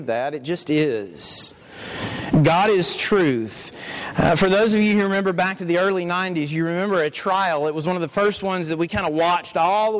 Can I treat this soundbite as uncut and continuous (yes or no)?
yes